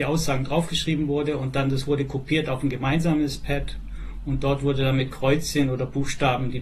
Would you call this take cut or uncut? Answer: uncut